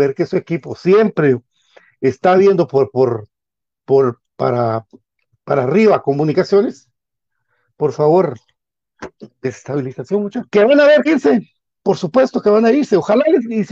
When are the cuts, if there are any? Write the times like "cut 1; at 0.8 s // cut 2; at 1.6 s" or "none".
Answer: cut 1; at 4.3 s // cut 2; at 10.5 s // cut 3; at 11.1 s